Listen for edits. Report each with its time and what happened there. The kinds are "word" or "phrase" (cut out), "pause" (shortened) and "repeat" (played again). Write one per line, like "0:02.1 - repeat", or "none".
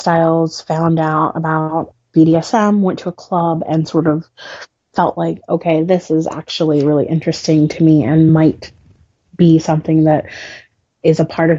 none